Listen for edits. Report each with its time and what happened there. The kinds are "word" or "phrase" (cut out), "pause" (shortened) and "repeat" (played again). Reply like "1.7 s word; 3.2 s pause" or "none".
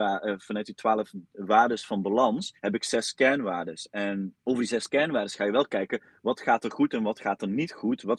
2.6 s pause; 4.4 s pause